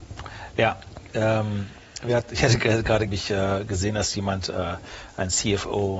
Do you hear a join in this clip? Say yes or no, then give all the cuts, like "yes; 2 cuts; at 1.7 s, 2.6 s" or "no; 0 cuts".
yes; 1 cut; at 3.1 s